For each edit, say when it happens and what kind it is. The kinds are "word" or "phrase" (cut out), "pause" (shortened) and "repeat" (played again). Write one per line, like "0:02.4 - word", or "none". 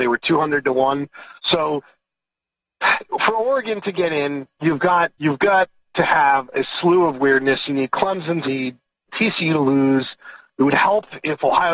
0:01.4 - pause
0:05.1 - pause
0:08.4 - phrase
0:09.1 - word